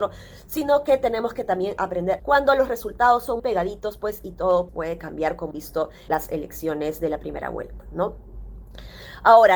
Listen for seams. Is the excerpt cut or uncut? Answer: cut